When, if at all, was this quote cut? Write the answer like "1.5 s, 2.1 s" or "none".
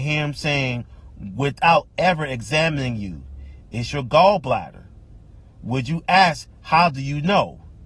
none